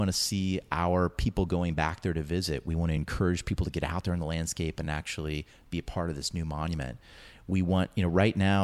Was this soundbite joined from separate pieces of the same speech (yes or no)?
no